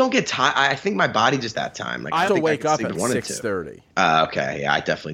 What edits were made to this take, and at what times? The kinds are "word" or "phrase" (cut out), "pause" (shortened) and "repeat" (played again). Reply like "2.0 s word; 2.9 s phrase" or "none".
1.5 s phrase; 2.3 s word; 2.9 s word; 3.9 s pause

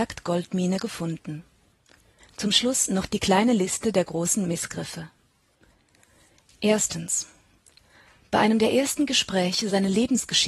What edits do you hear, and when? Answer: none

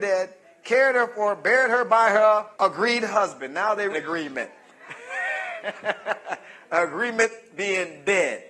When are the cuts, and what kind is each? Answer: 2.5 s pause; 3.9 s word

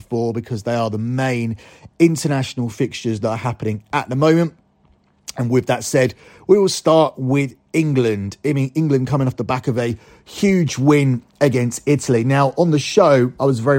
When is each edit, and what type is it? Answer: none

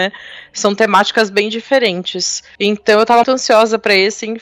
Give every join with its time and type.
3.2 s word

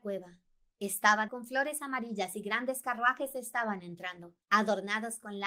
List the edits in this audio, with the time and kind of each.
1.3 s word; 4.4 s pause

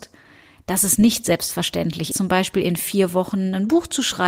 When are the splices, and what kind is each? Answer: 2.1 s word

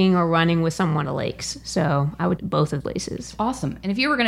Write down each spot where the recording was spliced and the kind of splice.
1.0 s word; 2.4 s phrase; 2.8 s word

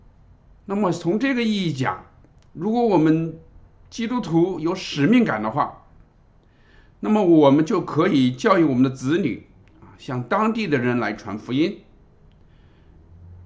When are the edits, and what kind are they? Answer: none

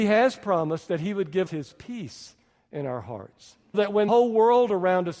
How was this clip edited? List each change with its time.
1.5 s word; 3.7 s word; 4.1 s word

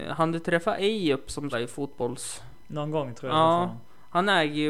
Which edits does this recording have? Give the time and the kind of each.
1.5 s word

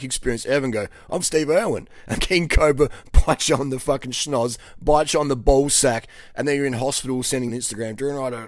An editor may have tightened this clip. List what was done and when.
1.2 s word; 2.2 s word; 7.5 s phrase

